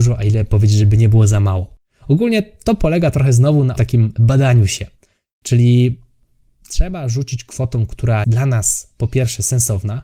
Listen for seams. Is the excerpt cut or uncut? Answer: cut